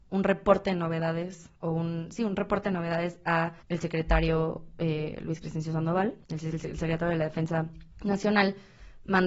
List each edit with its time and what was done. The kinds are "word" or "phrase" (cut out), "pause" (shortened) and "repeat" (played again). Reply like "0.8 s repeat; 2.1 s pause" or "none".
1.6 s pause; 3.6 s pause; 6.2 s pause; 7.9 s pause